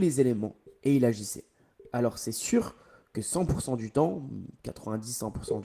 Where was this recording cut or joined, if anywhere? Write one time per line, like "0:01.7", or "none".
none